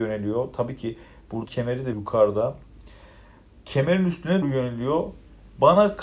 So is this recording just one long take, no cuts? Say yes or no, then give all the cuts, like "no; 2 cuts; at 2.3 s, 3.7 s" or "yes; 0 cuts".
no; 3 cuts; at 1.4 s, 1.9 s, 4.4 s